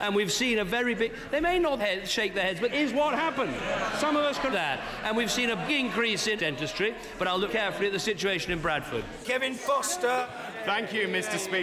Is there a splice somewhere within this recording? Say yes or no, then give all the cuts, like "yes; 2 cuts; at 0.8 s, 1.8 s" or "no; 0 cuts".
yes; 6 cuts; at 1.8 s, 2.7 s, 4.5 s, 5.7 s, 6.4 s, 7.5 s